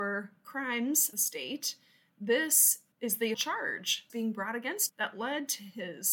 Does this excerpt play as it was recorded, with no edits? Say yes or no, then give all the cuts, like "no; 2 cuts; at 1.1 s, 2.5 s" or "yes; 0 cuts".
no; 5 cuts; at 1.1 s, 2.9 s, 3.3 s, 4.1 s, 4.9 s